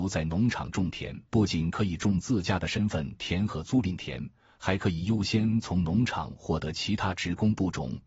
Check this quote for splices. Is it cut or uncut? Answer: cut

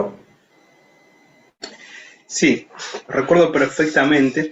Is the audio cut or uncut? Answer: uncut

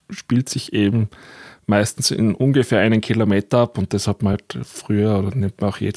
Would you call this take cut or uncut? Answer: uncut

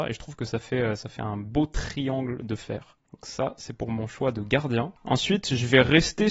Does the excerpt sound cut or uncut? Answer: cut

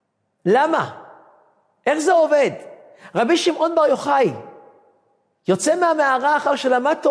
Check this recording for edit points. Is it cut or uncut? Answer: uncut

